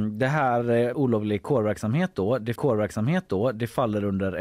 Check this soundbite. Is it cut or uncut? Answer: cut